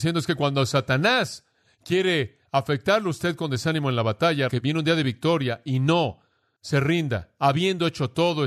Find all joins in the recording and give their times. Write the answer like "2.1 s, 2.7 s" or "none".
4.5 s